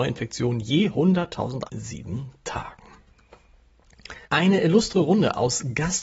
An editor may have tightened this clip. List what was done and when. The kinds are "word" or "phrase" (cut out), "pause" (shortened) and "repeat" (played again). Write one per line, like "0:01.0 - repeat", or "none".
0:01.7 - phrase
0:04.2 - pause